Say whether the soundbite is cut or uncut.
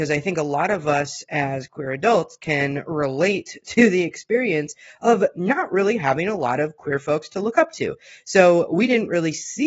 uncut